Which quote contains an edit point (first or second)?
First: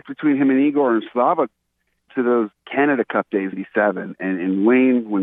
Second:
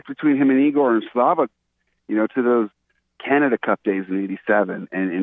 first